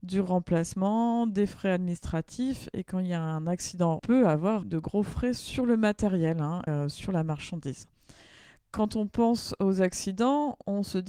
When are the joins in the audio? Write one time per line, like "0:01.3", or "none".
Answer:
0:04.0
0:04.6
0:06.7